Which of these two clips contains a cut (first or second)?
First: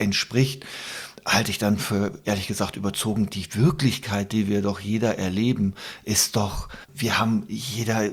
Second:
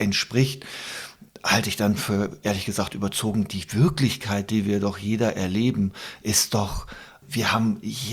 first